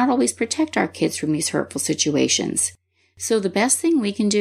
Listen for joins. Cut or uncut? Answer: uncut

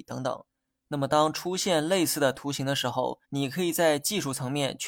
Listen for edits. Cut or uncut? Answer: cut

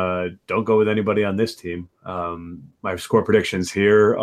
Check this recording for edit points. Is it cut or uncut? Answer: uncut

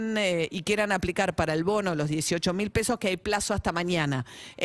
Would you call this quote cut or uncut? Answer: uncut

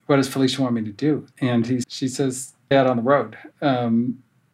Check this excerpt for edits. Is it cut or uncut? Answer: cut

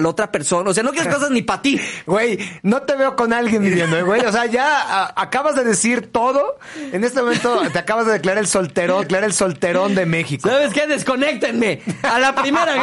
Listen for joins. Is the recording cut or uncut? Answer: cut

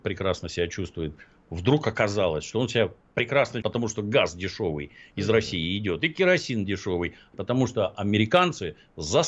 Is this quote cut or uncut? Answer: cut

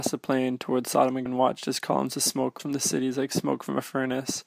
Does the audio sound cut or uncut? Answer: cut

